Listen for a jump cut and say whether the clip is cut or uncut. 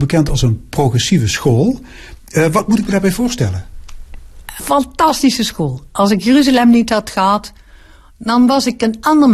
cut